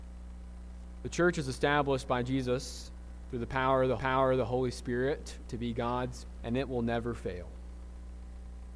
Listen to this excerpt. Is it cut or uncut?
cut